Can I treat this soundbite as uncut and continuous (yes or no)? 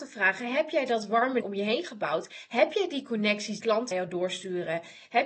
no